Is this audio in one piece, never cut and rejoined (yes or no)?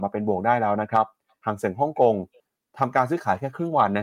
yes